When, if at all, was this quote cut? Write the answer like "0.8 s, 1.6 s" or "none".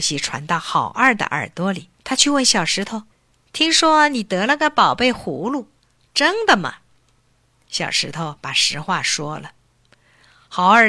1.9 s, 3.1 s

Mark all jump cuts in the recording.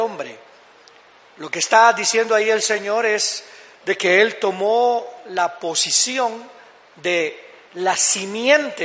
none

